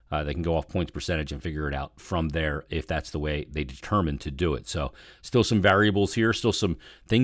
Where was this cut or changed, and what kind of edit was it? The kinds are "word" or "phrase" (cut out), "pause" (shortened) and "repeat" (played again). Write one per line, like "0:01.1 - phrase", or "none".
none